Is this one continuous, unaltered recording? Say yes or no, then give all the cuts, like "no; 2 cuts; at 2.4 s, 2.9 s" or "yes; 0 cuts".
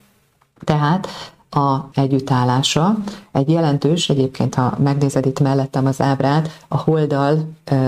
no; 1 cut; at 1.9 s